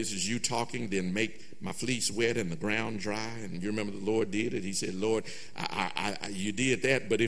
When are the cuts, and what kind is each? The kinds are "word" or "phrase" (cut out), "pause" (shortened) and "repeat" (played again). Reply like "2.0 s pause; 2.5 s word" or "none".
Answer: none